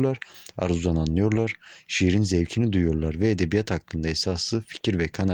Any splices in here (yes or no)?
no